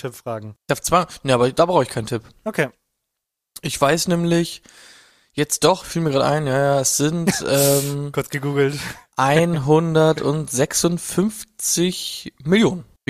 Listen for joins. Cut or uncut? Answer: uncut